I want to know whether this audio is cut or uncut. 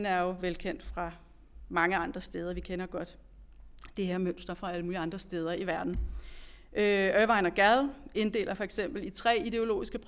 uncut